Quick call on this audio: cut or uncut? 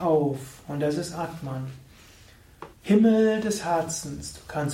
cut